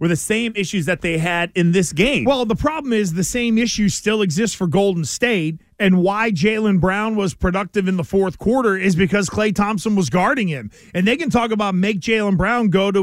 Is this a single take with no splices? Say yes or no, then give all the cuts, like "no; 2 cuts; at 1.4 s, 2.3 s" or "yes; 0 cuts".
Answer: yes; 0 cuts